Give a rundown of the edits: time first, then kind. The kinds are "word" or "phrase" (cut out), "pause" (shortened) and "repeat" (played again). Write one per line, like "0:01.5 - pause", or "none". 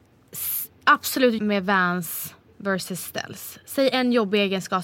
0:01.4 - word